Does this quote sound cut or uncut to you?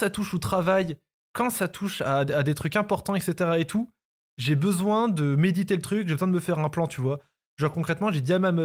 uncut